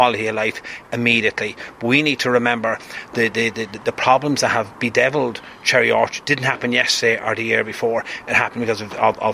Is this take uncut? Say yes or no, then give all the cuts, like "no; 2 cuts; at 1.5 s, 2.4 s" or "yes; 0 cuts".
yes; 0 cuts